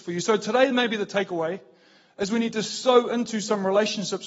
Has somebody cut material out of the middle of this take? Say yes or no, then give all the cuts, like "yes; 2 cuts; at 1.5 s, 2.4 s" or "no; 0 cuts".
no; 0 cuts